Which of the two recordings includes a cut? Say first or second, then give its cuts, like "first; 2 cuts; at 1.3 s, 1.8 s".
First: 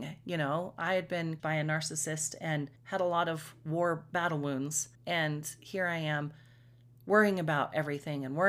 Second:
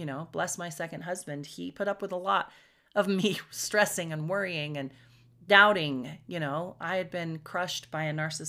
first; 3 cuts; at 1.4 s, 2.8 s, 4.9 s